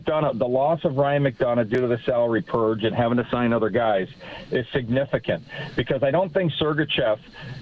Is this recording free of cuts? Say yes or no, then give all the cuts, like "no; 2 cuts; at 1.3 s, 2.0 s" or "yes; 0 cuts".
yes; 0 cuts